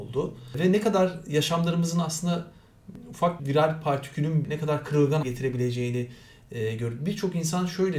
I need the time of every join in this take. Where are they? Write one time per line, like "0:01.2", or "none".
0:03.4
0:04.4
0:05.2